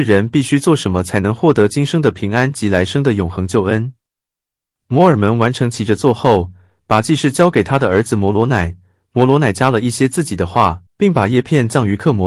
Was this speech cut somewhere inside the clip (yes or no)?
yes